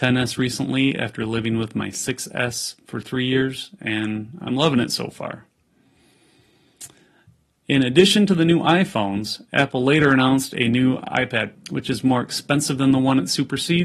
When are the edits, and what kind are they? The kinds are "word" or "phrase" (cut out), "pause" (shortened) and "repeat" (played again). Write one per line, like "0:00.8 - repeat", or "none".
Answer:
0:11.5 - word